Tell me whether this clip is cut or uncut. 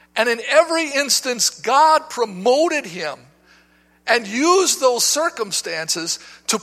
uncut